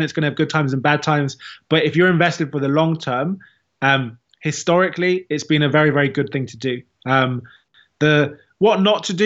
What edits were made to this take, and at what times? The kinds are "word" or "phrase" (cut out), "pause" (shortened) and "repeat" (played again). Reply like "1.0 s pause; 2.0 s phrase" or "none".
none